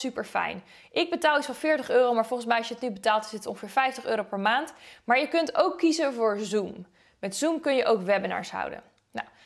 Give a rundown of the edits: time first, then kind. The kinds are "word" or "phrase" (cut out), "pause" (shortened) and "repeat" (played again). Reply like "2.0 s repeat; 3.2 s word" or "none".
none